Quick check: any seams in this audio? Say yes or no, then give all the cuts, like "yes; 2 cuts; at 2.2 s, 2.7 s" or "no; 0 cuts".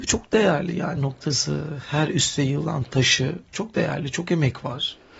yes; 2 cuts; at 1.0 s, 2.4 s